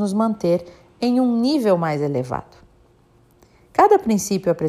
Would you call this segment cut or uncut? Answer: uncut